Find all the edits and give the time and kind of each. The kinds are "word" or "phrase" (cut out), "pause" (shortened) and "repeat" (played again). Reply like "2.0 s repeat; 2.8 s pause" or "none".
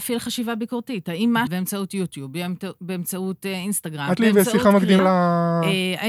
1.5 s phrase; 4.2 s word; 5.0 s word